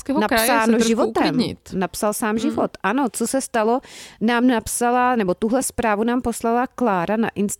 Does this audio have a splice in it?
no; 0 cuts

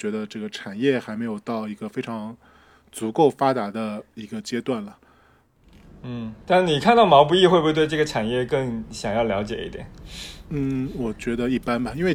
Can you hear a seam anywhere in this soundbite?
no; 0 cuts

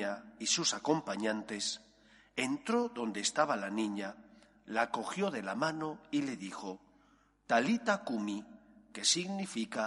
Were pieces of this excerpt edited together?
no; 0 cuts

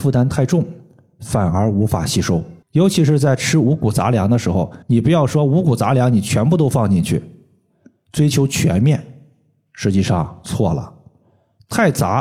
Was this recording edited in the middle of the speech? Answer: yes; 2 cuts; at 2.6 s, 4.8 s

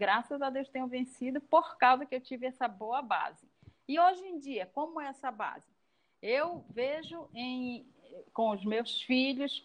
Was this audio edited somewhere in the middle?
no; 0 cuts

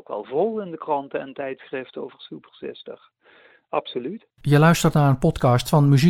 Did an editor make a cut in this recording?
no; 0 cuts

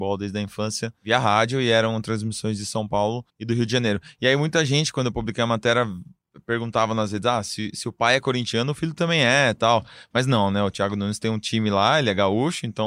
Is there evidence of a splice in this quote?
yes; 1 cut; at 3.3 s

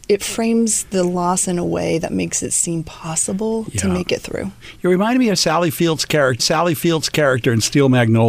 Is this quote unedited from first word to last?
no; 1 cut; at 6.4 s

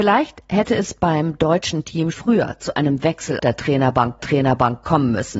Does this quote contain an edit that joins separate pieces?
yes; 3 cuts; at 2.1 s, 3.4 s, 4.2 s

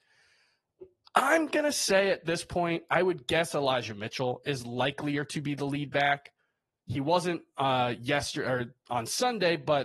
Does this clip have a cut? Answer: no; 0 cuts

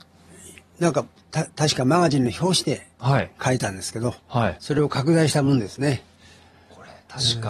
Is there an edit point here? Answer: no; 0 cuts

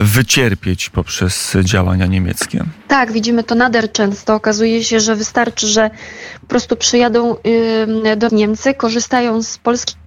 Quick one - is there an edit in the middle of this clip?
yes; 2 cuts; at 2.8 s, 8.3 s

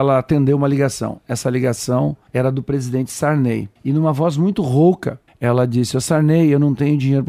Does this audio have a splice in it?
yes; 3 cuts; at 2.3 s, 3.8 s, 5.3 s

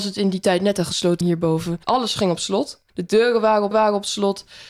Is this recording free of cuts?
no; 4 cuts; at 1.2 s, 1.8 s, 2.9 s, 3.7 s

